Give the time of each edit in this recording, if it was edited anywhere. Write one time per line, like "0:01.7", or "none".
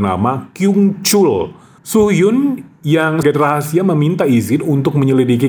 0:03.2

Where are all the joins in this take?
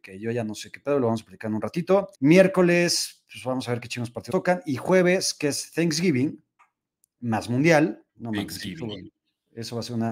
0:02.1
0:04.3
0:06.6
0:08.1

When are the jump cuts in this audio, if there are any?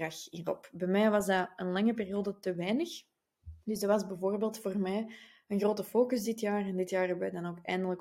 0:03.6

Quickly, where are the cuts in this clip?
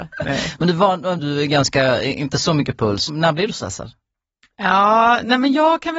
0:01.2
0:03.1

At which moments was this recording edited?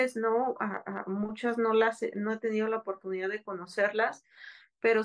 none

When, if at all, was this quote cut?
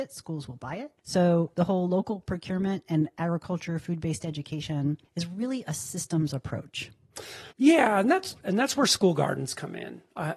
0:01.0
0:05.1
0:07.5

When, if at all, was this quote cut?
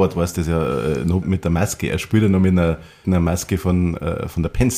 0:01.2
0:03.0

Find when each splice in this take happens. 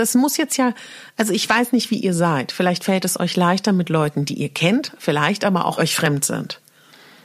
0:05.8

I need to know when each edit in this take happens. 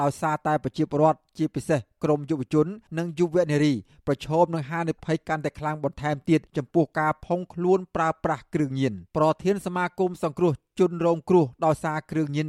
0:02.9
0:06.5
0:09.1

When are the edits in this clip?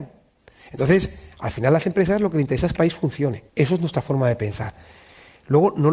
0:02.8
0:03.5

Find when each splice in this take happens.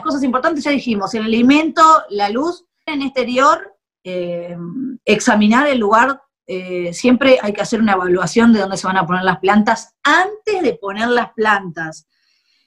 0:02.9

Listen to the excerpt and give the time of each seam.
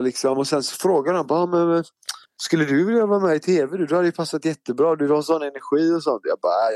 0:02.2

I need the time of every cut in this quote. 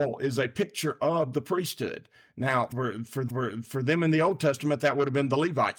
0:03.3

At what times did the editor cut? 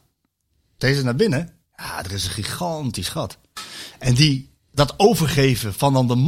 none

